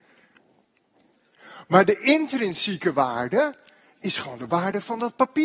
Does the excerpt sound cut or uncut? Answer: uncut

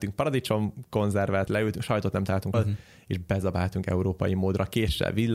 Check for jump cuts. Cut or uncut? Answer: cut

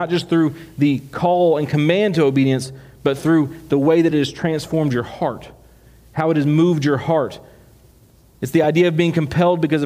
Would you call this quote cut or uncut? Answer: uncut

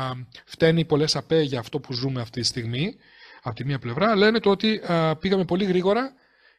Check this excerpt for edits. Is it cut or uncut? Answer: uncut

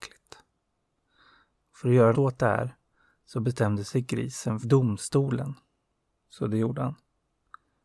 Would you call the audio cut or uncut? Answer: cut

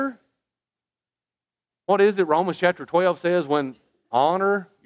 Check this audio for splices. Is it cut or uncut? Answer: uncut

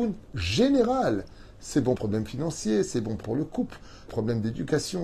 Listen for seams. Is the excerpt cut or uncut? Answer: cut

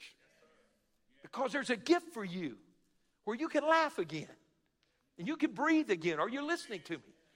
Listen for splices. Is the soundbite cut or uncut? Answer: uncut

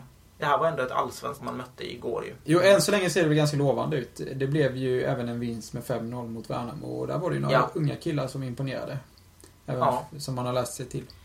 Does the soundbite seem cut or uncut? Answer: cut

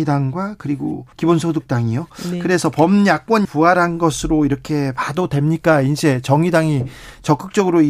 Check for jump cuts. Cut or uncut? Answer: cut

